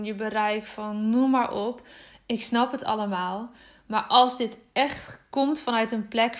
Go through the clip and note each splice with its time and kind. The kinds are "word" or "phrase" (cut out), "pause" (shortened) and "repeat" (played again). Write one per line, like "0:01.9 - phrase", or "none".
none